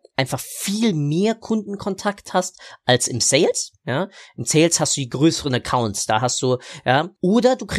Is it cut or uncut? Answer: uncut